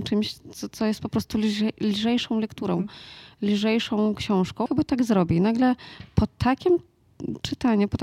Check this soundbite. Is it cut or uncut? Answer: cut